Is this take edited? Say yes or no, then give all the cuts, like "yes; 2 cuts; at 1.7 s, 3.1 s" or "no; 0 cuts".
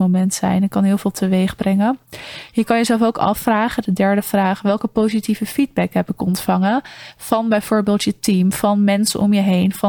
no; 0 cuts